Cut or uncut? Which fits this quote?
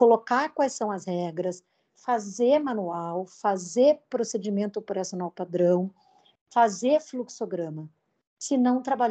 uncut